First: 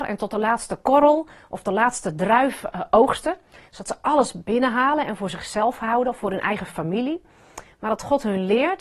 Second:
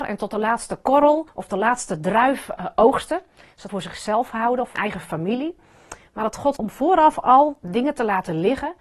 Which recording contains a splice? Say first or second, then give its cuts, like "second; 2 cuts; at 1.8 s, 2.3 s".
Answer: second; 4 cuts; at 1.3 s, 3.7 s, 4.7 s, 6.6 s